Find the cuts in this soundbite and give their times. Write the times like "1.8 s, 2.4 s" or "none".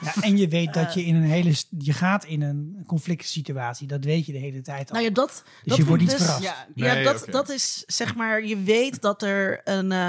none

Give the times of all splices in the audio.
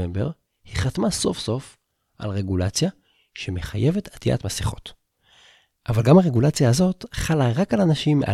none

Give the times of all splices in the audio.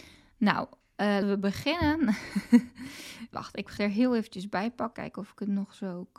1.2 s, 3.3 s, 3.8 s, 4.9 s

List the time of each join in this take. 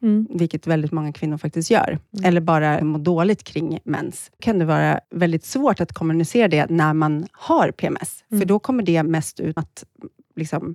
2.8 s, 4.4 s, 5.0 s, 9.6 s

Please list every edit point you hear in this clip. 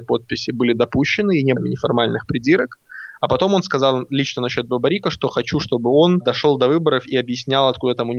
1.6 s

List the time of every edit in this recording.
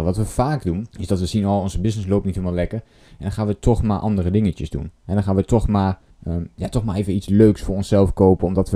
0.9 s, 6.1 s

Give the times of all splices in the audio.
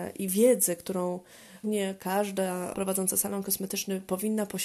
1.6 s, 2.7 s

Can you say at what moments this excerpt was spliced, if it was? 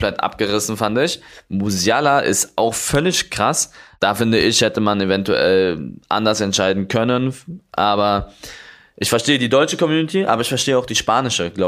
none

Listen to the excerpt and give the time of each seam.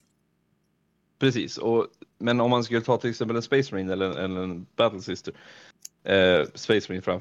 2.1 s

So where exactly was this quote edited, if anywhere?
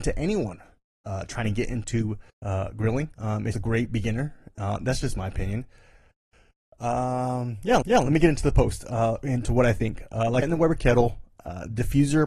2.3 s, 3.1 s, 3.5 s, 7.8 s, 10.4 s

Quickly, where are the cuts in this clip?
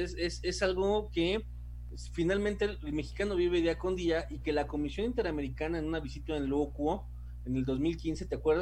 none

